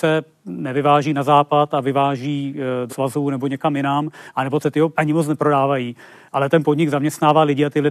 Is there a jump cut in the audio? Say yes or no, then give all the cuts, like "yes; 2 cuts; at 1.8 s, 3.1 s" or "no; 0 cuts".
yes; 3 cuts; at 2.9 s, 4.6 s, 4.9 s